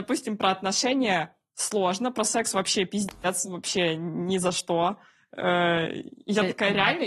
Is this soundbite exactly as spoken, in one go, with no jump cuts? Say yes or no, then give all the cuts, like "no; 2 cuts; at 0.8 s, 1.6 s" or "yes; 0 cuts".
yes; 0 cuts